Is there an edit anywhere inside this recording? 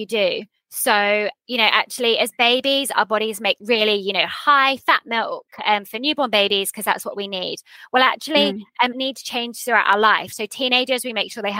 yes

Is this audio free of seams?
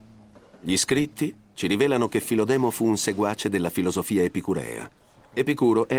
no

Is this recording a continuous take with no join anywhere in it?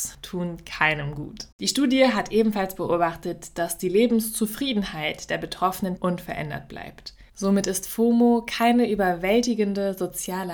no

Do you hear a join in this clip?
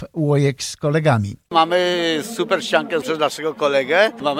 yes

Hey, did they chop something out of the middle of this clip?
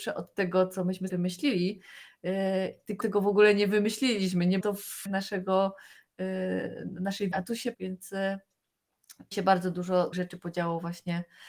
yes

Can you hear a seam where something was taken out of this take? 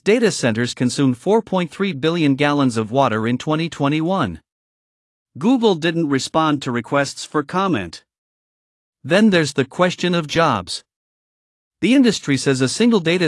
no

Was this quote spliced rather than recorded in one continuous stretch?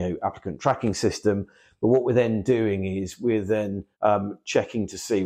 yes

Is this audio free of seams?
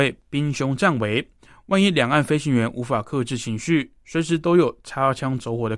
yes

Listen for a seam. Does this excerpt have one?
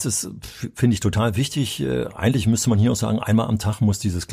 no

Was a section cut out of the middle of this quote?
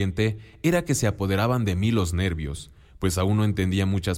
no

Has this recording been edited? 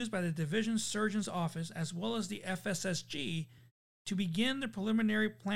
no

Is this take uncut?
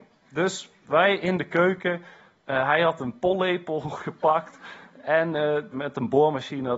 yes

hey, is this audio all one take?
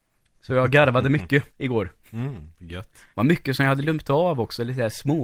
no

